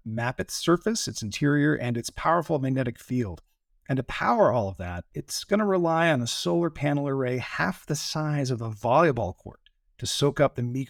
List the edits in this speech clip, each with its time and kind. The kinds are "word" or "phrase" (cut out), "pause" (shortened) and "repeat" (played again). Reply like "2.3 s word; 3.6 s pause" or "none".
none